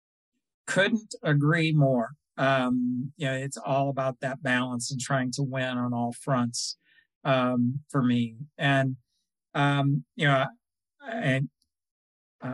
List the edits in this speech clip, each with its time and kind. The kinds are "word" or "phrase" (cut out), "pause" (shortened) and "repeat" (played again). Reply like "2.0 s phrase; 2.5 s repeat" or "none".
none